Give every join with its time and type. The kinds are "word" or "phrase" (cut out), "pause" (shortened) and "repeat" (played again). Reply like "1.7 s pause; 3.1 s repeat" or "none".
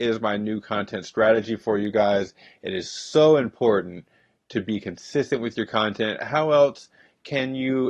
none

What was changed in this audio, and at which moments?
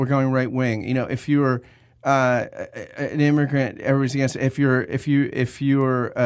none

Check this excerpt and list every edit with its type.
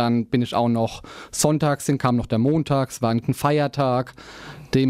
2.0 s phrase; 3.2 s word

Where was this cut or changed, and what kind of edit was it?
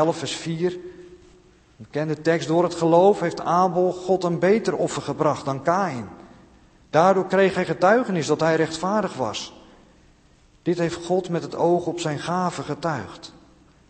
none

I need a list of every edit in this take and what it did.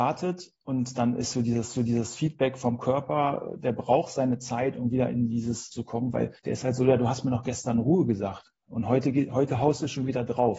1.8 s repeat; 5.7 s phrase; 6.4 s pause

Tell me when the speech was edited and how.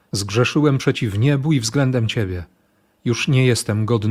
none

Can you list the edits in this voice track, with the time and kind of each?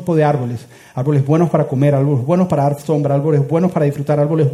none

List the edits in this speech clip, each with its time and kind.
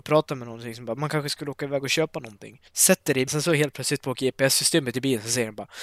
2.7 s pause; 3.3 s word

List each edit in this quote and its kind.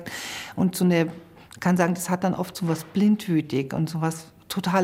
none

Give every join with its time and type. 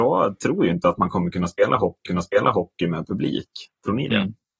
2.1 s repeat

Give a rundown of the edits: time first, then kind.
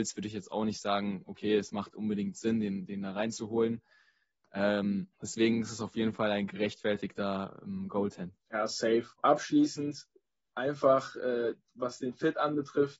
5.1 s pause; 8.4 s pause

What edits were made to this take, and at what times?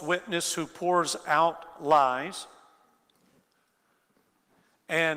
none

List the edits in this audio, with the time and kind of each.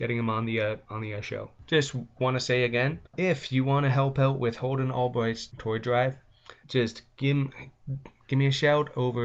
3.1 s pause; 6.6 s pause

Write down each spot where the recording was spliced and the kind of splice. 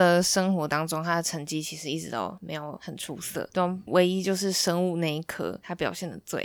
3.5 s word

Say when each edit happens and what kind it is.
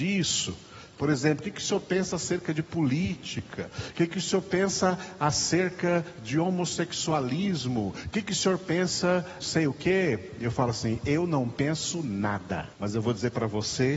9.4 s phrase; 12.7 s pause

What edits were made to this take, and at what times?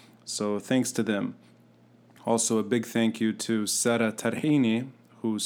none

